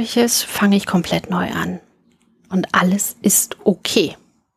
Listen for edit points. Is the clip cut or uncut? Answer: uncut